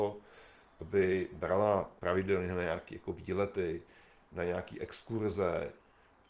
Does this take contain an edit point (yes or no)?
yes